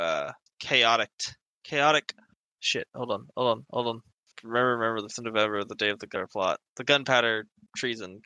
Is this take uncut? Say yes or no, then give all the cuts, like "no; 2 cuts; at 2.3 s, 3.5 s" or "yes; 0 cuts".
no; 2 cuts; at 2.5 s, 4.3 s